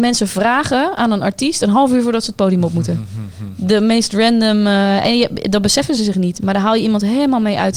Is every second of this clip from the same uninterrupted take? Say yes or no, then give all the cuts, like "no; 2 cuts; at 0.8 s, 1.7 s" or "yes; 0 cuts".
yes; 0 cuts